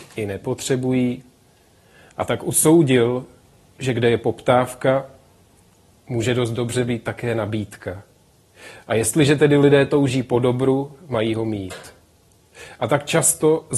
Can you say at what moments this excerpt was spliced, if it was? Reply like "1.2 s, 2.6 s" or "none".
none